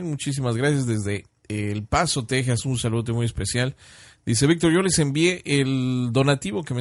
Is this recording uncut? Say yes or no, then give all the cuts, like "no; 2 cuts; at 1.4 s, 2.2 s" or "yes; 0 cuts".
yes; 0 cuts